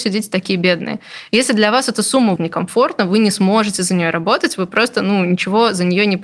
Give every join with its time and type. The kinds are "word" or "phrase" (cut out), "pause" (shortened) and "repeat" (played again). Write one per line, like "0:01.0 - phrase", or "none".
0:02.4 - word